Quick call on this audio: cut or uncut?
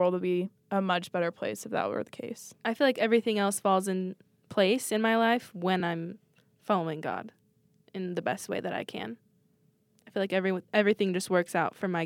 uncut